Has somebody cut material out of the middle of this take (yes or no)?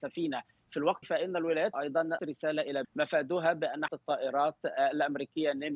yes